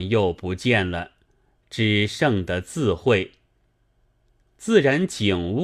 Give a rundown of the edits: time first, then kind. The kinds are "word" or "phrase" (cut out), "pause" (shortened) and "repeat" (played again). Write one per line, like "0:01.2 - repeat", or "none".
none